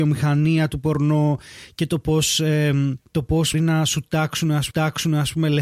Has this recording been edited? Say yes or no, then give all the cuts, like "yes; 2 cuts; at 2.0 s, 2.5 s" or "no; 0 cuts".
yes; 3 cuts; at 3.0 s, 3.5 s, 4.7 s